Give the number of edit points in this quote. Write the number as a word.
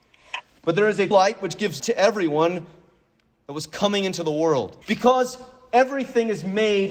three